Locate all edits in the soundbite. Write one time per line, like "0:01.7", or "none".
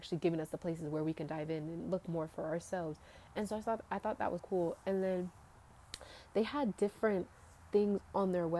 0:04.4

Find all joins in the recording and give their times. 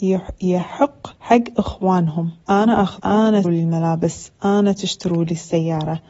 0:01.1
0:02.4
0:03.0
0:03.4

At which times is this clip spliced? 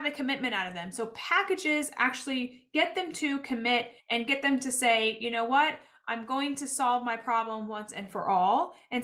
0:04.0

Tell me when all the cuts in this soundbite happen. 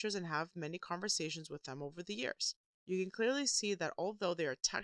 0:02.7

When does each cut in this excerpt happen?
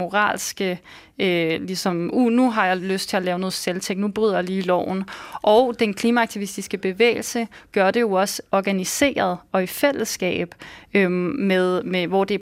none

